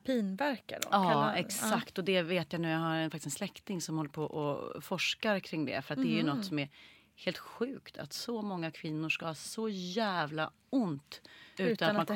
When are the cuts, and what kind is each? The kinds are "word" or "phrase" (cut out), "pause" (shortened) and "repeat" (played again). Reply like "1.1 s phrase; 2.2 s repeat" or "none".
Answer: none